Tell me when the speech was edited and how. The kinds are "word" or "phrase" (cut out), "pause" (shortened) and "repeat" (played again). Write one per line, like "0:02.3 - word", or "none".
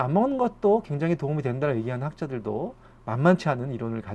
none